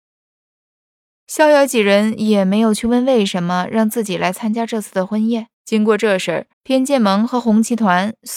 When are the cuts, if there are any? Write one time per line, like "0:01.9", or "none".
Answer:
0:05.5
0:06.5

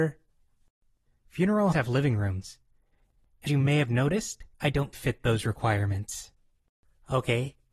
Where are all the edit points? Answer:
0:01.7
0:03.5
0:04.5
0:04.9

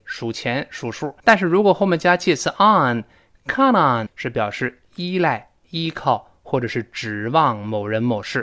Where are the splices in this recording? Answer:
0:01.2
0:04.1

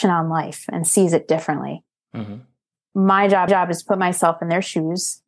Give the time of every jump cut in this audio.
0:03.5

